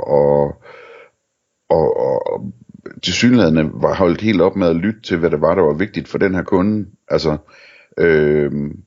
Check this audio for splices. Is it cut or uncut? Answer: uncut